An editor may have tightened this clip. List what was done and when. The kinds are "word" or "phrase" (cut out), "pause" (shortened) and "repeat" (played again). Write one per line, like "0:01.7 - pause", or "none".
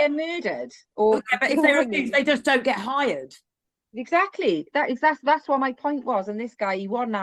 none